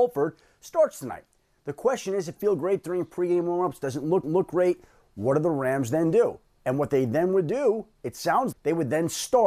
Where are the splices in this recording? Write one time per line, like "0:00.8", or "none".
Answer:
0:02.4
0:04.2
0:08.5